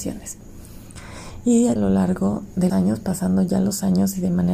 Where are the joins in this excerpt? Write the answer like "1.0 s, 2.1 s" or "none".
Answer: 1.8 s, 2.7 s